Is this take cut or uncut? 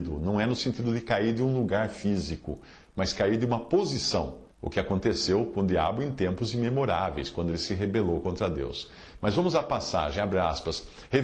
cut